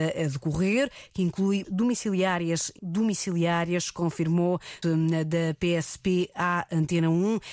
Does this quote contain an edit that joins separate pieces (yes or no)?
yes